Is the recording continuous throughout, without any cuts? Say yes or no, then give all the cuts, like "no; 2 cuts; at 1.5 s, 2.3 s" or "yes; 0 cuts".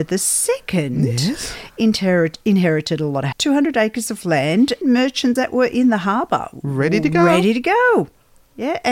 no; 3 cuts; at 3.3 s, 4.8 s, 5.4 s